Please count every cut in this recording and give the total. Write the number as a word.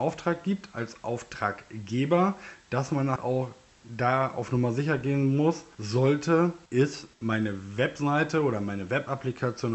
one